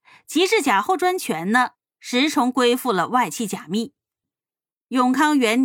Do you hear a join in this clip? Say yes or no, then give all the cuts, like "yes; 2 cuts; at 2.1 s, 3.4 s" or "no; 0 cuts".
no; 0 cuts